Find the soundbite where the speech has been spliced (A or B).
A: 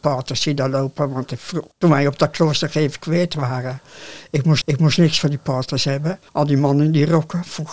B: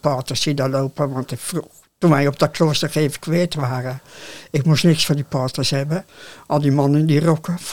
A